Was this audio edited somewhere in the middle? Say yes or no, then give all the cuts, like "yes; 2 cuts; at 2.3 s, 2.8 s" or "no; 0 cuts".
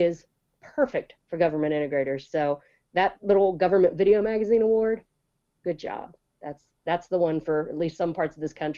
no; 0 cuts